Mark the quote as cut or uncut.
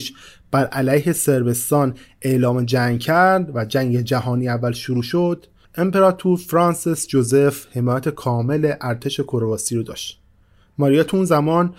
uncut